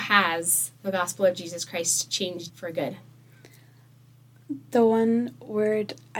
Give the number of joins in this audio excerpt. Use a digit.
1